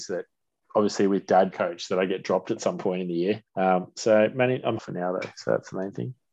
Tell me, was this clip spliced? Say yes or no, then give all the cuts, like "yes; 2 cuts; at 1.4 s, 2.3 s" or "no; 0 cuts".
yes; 3 cuts; at 1.5 s, 3.5 s, 4.8 s